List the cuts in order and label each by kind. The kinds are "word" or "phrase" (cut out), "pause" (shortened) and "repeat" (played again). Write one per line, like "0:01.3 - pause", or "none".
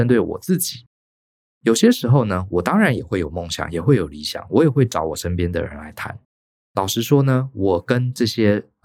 none